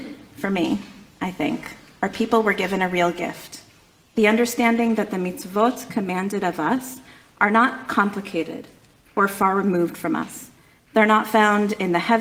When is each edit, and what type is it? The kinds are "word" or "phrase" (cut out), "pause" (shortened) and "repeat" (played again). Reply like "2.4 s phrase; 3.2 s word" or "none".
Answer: none